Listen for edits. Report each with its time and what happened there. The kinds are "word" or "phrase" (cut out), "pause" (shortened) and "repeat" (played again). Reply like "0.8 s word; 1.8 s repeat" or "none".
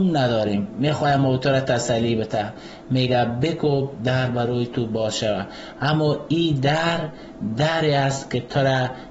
none

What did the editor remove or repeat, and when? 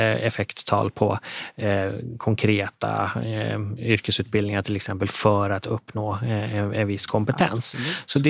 none

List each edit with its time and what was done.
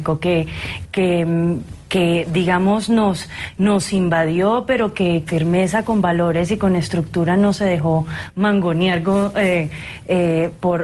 5.3 s word

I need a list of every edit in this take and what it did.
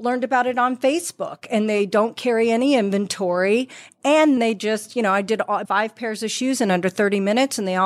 4.4 s word; 5.6 s word

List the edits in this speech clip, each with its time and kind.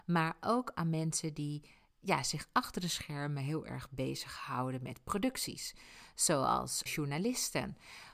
6.9 s word

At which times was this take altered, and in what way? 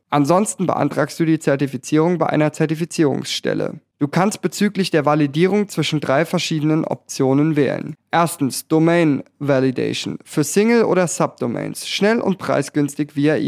none

